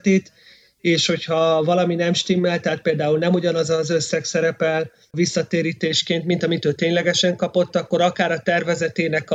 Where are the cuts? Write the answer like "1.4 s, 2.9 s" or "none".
none